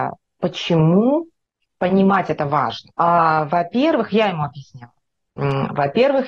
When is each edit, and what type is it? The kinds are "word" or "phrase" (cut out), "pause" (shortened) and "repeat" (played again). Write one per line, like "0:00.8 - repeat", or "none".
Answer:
0:01.4 - pause
0:02.9 - pause